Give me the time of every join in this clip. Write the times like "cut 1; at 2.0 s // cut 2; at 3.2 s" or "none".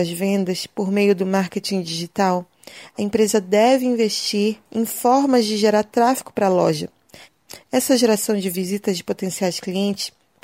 cut 1; at 4.7 s